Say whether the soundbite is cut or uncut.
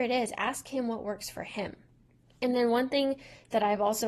uncut